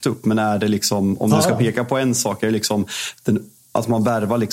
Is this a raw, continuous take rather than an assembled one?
yes; 0 cuts

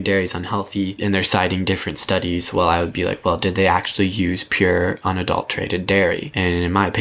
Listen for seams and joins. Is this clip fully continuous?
yes; 0 cuts

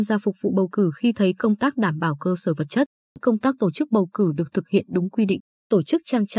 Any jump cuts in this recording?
no; 0 cuts

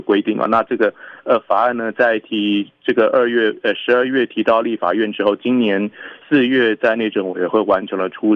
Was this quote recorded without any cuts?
no; 1 cut; at 6.2 s

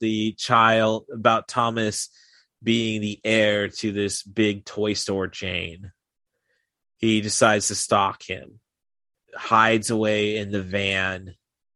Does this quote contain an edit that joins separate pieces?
no; 0 cuts

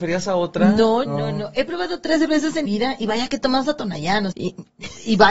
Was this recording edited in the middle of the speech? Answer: yes; 3 cuts; at 1.1 s, 2.7 s, 4.3 s

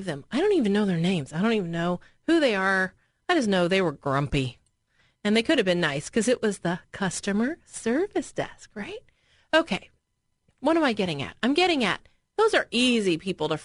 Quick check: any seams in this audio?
no; 0 cuts

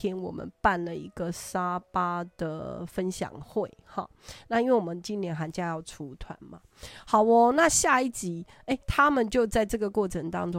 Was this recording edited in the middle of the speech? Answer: yes; 1 cut; at 8.8 s

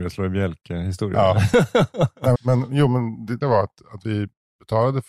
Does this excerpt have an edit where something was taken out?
yes; 2 cuts; at 2.4 s, 3.4 s

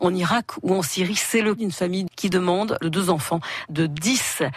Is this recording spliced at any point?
yes; 4 cuts; at 1.6 s, 2.1 s, 2.8 s, 3.7 s

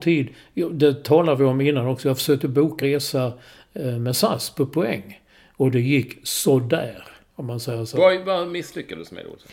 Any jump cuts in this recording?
yes; 1 cut; at 2.8 s

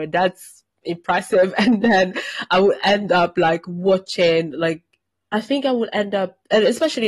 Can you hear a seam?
no; 0 cuts

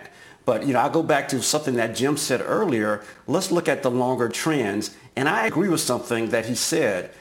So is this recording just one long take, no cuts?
no; 1 cut; at 5.5 s

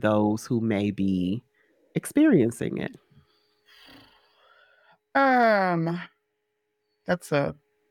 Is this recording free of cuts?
yes; 0 cuts

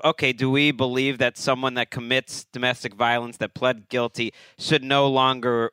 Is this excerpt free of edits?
yes; 0 cuts

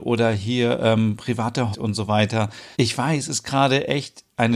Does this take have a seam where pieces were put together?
yes; 3 cuts; at 1.7 s, 2.7 s, 3.3 s

